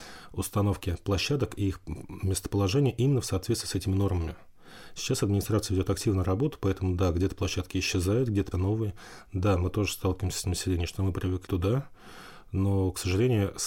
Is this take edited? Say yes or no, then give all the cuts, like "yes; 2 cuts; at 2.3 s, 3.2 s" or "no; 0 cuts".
yes; 3 cuts; at 8.5 s, 10.4 s, 11.5 s